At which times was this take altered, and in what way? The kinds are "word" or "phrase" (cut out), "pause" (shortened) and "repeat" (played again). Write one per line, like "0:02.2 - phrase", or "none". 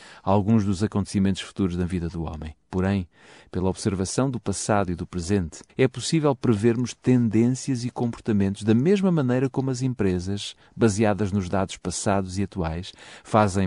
0:02.6 - pause
0:05.7 - pause